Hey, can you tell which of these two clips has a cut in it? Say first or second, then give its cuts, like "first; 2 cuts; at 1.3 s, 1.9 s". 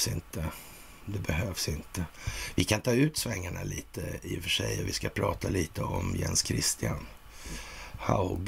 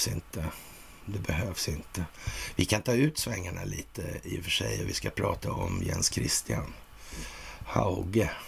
second; 1 cut; at 5.4 s